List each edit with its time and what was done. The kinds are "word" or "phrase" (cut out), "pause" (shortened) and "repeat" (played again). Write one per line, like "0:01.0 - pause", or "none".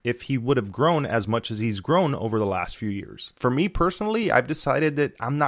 none